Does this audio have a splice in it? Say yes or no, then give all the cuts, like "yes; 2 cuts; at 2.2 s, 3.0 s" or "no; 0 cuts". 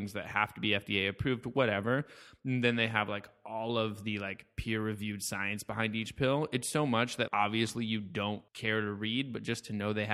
yes; 2 cuts; at 7.3 s, 8.5 s